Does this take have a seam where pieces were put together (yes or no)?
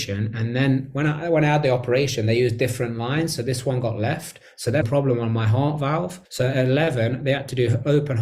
yes